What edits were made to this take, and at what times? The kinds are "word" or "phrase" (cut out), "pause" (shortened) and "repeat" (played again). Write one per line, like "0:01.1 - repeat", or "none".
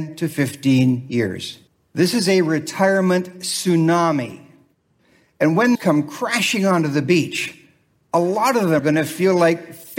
0:01.7 - pause
0:05.7 - phrase
0:08.8 - word